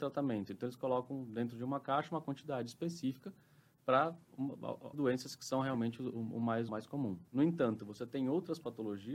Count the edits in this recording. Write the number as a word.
three